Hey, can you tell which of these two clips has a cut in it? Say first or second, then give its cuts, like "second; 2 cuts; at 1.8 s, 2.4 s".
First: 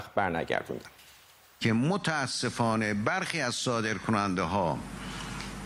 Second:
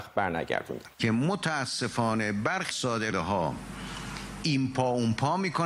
second; 3 cuts; at 0.9 s, 2.7 s, 3.1 s